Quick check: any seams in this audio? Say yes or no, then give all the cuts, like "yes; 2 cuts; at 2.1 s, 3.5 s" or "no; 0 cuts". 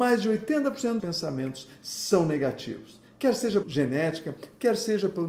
yes; 2 cuts; at 1.0 s, 3.6 s